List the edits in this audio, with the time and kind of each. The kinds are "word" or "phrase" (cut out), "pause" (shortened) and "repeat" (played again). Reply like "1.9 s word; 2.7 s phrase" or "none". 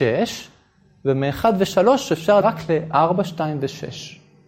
2.4 s word